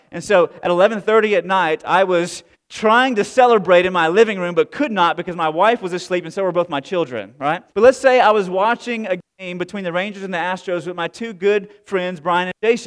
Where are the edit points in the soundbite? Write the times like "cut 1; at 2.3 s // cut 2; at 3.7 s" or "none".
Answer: cut 1; at 2.5 s // cut 2; at 7.7 s